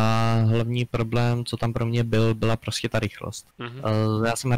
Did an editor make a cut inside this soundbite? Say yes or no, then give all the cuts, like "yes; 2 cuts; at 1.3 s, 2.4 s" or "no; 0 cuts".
yes; 1 cut; at 3.5 s